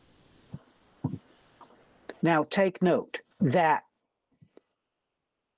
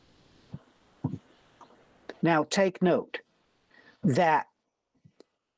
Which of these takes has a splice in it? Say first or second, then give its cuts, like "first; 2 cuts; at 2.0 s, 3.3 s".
first; 1 cut; at 3.3 s